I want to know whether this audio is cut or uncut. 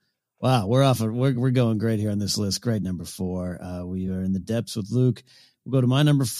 uncut